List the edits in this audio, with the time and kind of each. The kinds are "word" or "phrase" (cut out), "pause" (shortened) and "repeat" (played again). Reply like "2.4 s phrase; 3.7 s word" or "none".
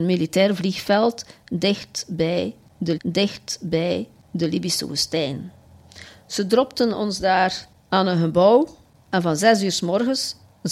3.0 s repeat